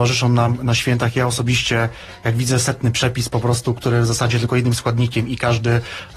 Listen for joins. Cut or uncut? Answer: cut